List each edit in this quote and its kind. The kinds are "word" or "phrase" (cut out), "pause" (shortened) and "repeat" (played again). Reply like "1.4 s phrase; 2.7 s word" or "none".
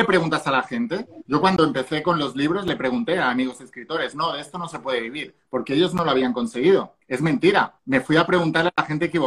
7.0 s pause; 7.8 s pause